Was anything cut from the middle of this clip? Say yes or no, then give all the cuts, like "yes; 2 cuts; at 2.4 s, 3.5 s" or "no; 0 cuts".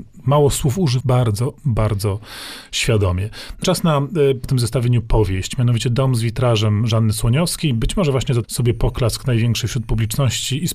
yes; 4 cuts; at 1.0 s, 3.6 s, 4.4 s, 8.4 s